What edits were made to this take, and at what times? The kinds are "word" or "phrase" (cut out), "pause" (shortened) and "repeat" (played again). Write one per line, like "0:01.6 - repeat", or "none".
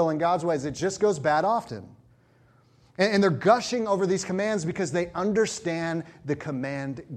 none

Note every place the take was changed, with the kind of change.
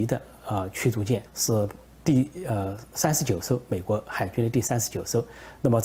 0:01.3 - pause

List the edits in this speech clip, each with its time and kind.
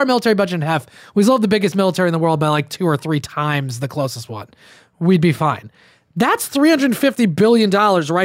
none

